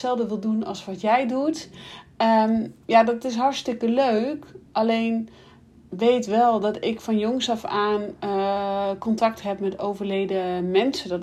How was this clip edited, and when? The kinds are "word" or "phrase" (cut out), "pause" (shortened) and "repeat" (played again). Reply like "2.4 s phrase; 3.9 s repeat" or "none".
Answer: none